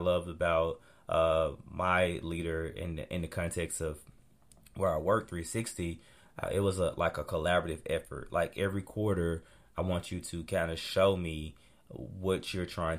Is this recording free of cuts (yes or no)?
yes